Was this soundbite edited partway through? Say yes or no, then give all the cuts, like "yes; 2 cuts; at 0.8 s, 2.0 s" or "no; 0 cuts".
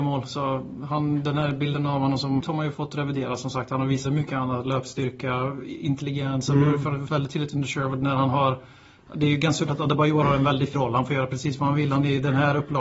yes; 6 cuts; at 2.4 s, 2.7 s, 4.1 s, 7.1 s, 9.7 s, 10.7 s